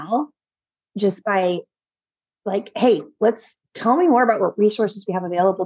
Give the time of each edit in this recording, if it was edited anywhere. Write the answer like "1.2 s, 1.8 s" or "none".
none